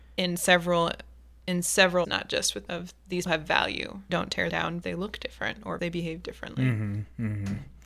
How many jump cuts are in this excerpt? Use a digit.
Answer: 7